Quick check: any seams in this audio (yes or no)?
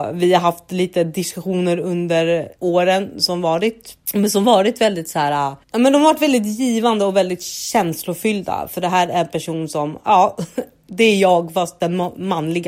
yes